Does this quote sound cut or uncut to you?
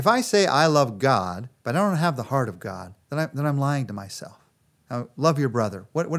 cut